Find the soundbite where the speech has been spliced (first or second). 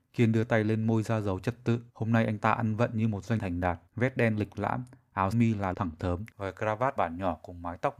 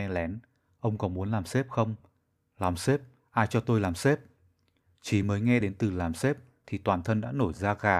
first